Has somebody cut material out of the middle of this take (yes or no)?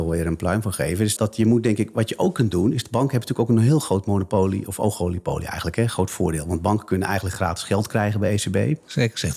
yes